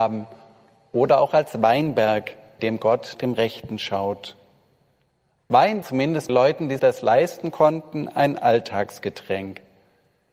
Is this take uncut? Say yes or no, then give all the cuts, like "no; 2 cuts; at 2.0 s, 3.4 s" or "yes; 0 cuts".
no; 5 cuts; at 2.6 s, 3.1 s, 5.8 s, 6.3 s, 6.8 s